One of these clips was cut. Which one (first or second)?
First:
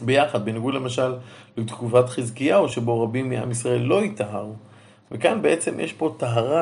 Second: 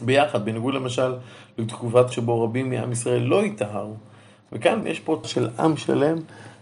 second